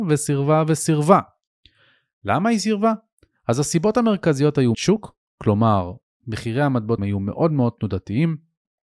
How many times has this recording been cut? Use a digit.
2